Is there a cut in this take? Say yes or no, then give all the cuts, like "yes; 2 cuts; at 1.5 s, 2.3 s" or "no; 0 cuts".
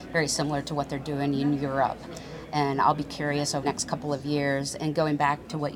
yes; 1 cut; at 3.6 s